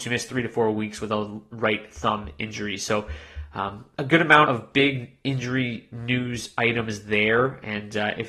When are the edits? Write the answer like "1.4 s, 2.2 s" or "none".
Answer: 4.0 s, 4.5 s